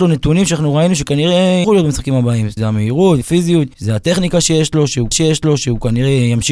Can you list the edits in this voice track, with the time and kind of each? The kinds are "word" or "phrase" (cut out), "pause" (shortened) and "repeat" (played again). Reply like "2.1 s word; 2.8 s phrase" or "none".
1.6 s word; 2.6 s word; 3.2 s word; 3.7 s pause; 5.1 s repeat